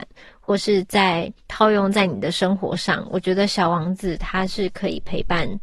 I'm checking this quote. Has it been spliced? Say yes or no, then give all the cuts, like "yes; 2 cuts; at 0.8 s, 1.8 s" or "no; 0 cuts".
yes; 1 cut; at 1.4 s